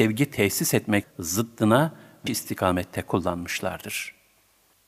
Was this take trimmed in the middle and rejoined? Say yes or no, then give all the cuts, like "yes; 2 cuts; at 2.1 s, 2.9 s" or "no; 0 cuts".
yes; 2 cuts; at 1.0 s, 2.3 s